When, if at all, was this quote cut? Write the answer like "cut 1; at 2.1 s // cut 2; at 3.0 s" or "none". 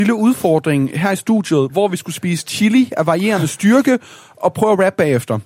none